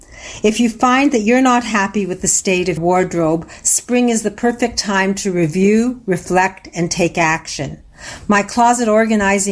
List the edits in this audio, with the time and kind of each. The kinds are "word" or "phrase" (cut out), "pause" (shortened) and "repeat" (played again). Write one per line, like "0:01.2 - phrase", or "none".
0:02.8 - word